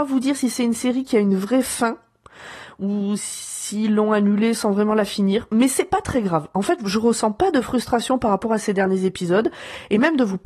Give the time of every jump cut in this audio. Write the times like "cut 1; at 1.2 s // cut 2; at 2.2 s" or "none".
none